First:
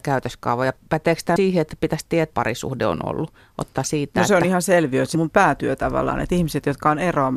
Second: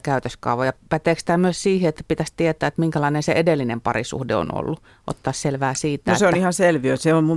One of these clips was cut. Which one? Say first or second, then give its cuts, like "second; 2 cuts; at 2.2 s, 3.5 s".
first; 4 cuts; at 1.4 s, 2.3 s, 3.8 s, 5.1 s